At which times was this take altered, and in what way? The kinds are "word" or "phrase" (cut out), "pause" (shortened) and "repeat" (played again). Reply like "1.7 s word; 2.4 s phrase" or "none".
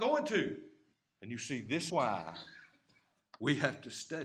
0.9 s pause; 1.9 s word